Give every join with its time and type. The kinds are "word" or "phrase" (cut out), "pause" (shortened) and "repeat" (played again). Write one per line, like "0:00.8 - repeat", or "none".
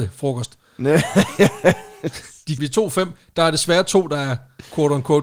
0:02.6 - phrase